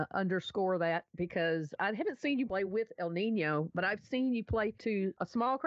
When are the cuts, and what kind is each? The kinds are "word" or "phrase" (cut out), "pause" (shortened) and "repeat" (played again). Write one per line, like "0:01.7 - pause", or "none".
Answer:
none

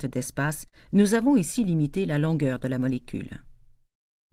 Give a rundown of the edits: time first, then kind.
none

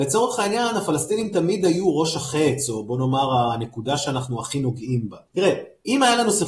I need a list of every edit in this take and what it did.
0:05.3 - pause

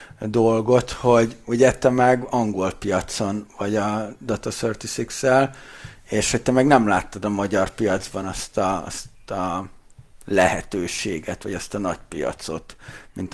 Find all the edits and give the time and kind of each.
none

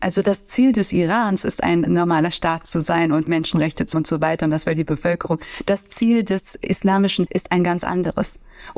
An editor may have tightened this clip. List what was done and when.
0:01.9 - word
0:03.9 - word
0:07.3 - word

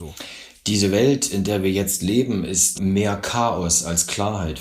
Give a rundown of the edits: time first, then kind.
0:02.7 - word

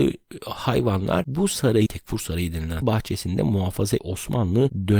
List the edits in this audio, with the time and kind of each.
0:01.9 - word
0:02.8 - word
0:04.0 - word

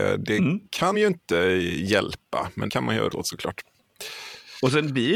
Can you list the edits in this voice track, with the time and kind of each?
0:00.9 - word
0:02.7 - word
0:03.1 - word

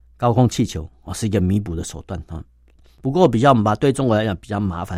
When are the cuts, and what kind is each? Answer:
none

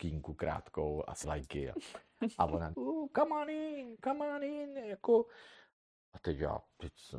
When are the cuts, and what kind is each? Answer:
0:01.2 - word
0:02.7 - word

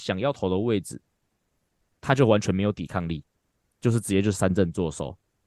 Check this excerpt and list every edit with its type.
none

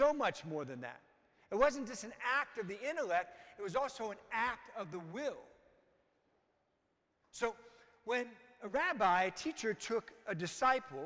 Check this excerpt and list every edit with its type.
none

